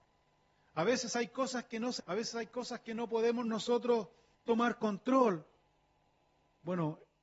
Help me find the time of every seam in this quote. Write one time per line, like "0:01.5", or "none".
0:02.0
0:04.3